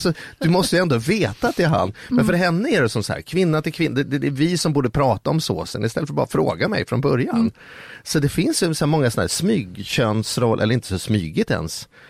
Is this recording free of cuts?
yes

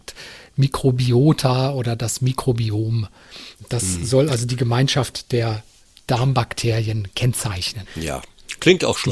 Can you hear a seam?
no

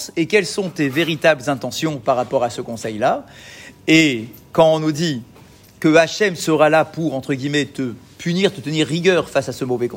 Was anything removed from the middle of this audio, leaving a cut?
no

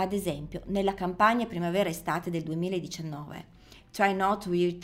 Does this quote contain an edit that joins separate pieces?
no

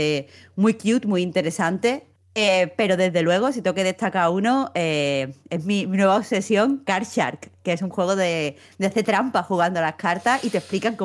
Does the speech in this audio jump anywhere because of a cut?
yes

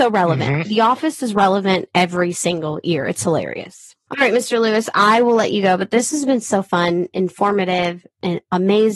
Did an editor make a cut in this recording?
no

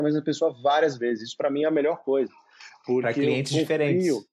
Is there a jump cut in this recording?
no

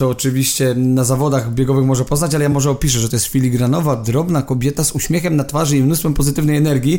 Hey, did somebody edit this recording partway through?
no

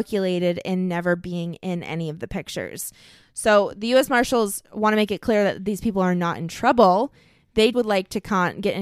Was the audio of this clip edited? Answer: yes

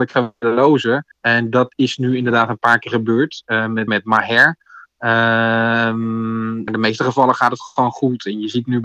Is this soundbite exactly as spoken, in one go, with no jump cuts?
no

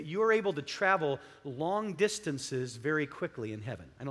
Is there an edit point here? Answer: no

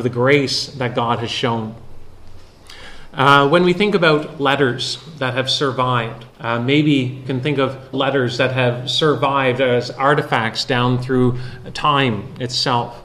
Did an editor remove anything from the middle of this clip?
yes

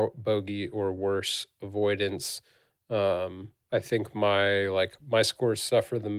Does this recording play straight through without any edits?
yes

